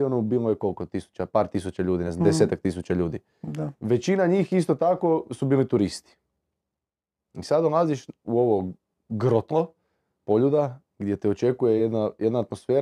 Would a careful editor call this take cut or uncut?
uncut